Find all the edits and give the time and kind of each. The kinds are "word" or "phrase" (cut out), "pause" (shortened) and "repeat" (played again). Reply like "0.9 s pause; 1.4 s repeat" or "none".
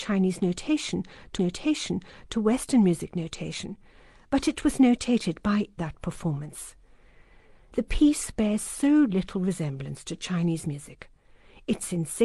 1.4 s repeat; 5.8 s phrase

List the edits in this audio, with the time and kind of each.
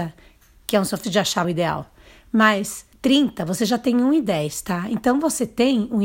1.0 s word; 1.4 s phrase; 2.9 s pause

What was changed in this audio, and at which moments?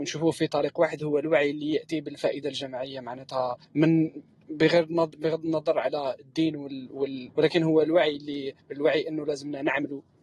3.6 s pause; 7.3 s phrase; 8.6 s pause

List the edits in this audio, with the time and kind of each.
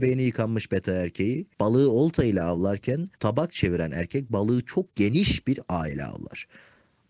1.5 s pause; 3.1 s pause; 4.9 s pause

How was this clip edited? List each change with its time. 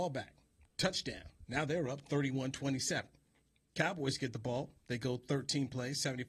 4.8 s pause

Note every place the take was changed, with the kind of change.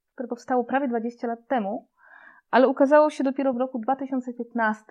none

